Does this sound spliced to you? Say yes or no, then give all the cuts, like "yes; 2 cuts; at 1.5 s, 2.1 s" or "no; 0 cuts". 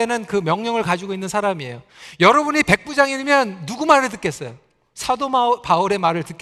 no; 0 cuts